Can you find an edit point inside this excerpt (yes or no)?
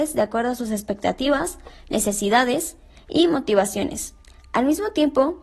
no